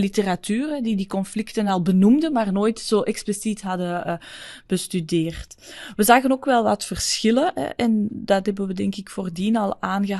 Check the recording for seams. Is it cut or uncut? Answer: uncut